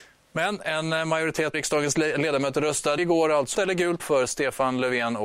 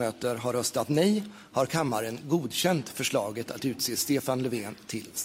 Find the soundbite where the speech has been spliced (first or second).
first